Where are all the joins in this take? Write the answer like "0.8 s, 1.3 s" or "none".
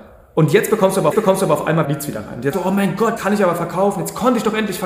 1.1 s, 1.8 s, 2.5 s, 3.2 s